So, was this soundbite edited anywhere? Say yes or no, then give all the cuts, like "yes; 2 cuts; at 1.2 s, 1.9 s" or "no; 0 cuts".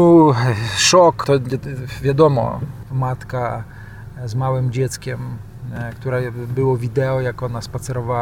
yes; 2 cuts; at 1.2 s, 2.9 s